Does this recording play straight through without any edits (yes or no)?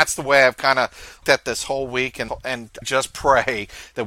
no